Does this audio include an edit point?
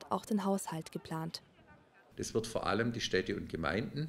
no; 0 cuts

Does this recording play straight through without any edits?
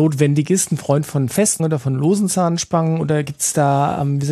no; 1 cut; at 1.6 s

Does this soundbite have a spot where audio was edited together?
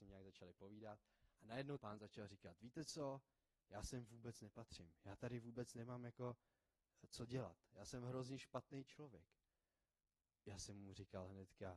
yes; 2 cuts; at 1.8 s, 10.4 s

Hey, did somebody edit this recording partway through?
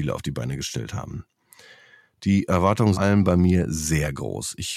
yes; 1 cut; at 2.9 s

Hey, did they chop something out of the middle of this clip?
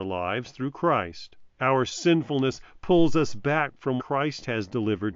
yes; 2 cuts; at 1.5 s, 4.0 s

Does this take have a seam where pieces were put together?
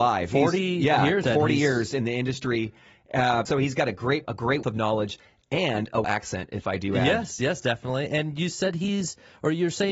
yes; 5 cuts; at 1.2 s, 3.5 s, 4.2 s, 4.6 s, 6.0 s

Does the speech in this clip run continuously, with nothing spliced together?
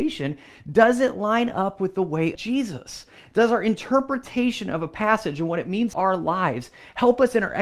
no; 2 cuts; at 2.3 s, 5.9 s

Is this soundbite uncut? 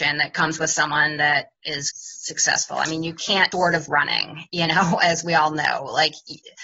no; 3 cuts; at 1.9 s, 3.5 s, 3.9 s

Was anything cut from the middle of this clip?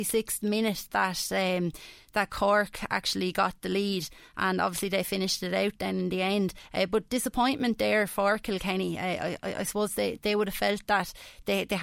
no; 0 cuts

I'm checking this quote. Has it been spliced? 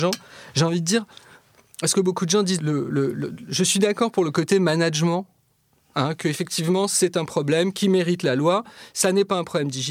yes; 1 cut; at 2.6 s

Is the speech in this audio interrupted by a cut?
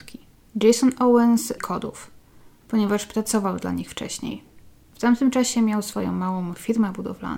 yes; 1 cut; at 1.6 s

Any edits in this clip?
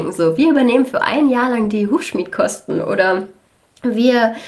no; 0 cuts

